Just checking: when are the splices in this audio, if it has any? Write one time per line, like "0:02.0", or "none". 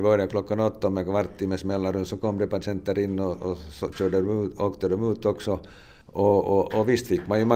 0:06.0